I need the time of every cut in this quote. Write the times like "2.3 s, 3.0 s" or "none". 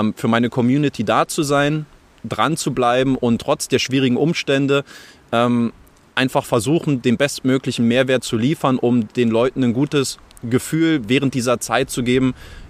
none